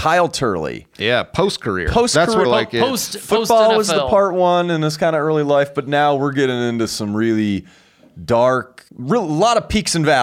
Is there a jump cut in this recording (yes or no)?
yes